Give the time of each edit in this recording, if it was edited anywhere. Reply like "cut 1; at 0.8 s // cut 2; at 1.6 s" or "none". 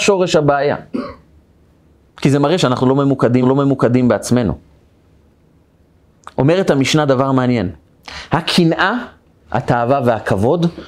cut 1; at 3.4 s